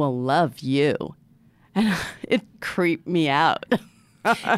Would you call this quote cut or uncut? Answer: cut